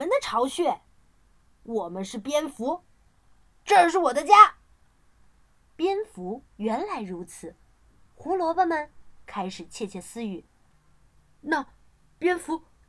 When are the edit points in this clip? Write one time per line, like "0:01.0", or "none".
0:04.6
0:06.5